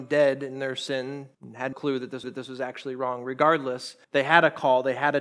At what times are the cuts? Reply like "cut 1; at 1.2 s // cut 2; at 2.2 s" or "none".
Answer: cut 1; at 1.3 s // cut 2; at 1.7 s // cut 3; at 2.2 s // cut 4; at 4.0 s

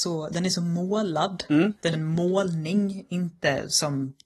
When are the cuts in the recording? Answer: cut 1; at 1.9 s

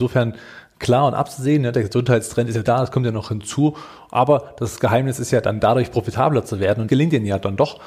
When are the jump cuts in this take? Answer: cut 1; at 2.7 s // cut 2; at 6.9 s

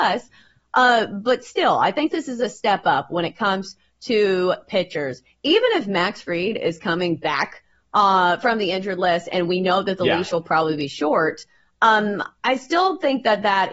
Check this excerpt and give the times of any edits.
none

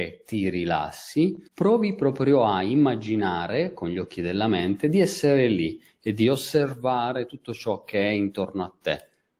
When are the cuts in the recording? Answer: cut 1; at 1.5 s

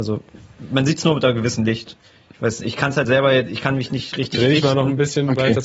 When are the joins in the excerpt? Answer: none

